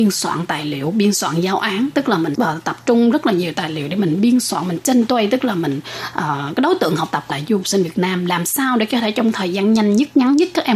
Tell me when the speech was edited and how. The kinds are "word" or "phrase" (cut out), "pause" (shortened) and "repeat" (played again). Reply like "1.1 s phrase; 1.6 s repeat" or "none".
2.3 s word; 7.3 s word